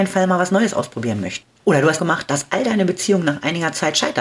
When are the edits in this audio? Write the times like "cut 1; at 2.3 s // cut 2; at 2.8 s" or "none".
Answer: cut 1; at 1.5 s // cut 2; at 2.0 s